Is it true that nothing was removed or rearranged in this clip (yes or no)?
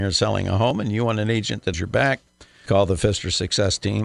no